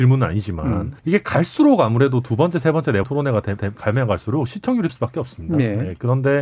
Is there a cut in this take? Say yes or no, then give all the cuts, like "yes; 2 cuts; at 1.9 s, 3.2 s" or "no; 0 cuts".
yes; 4 cuts; at 1.0 s, 3.0 s, 3.6 s, 4.9 s